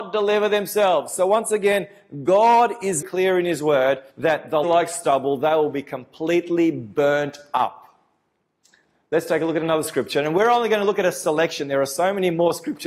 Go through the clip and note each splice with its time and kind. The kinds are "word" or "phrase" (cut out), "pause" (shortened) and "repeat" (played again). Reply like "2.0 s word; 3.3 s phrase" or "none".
3.0 s word; 4.1 s pause; 4.6 s phrase